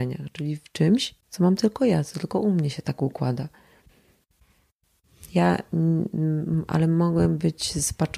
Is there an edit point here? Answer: yes; 1 cut; at 1.2 s

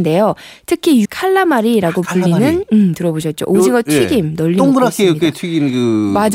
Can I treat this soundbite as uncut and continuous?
no; 1 cut; at 1.0 s

